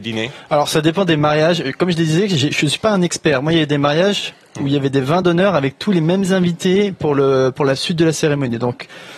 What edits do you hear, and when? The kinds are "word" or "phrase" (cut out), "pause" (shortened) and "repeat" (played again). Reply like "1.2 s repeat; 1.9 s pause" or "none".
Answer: none